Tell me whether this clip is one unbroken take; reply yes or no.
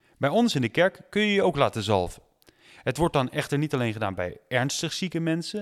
yes